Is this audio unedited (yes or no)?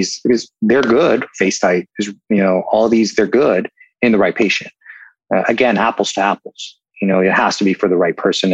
yes